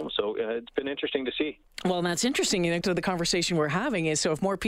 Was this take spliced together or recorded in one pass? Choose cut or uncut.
cut